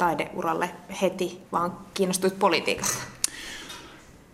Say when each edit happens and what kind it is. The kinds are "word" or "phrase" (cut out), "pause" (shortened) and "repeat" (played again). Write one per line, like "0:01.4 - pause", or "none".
0:01.5 - pause